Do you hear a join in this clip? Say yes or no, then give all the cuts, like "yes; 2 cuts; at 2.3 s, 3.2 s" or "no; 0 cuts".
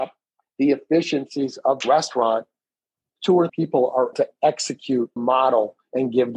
yes; 4 cuts; at 1.8 s, 3.5 s, 4.1 s, 5.2 s